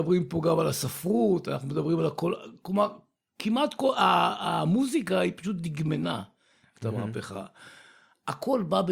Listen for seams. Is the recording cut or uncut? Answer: uncut